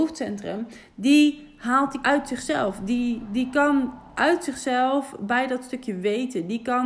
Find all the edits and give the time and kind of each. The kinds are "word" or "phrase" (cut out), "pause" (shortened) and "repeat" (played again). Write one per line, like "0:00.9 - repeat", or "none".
0:02.0 - word